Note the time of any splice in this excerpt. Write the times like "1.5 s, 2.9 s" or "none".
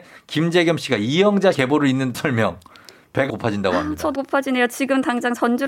1.5 s, 2.1 s, 3.3 s, 4.2 s